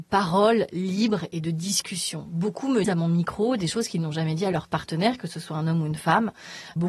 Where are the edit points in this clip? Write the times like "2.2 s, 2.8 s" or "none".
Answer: 2.8 s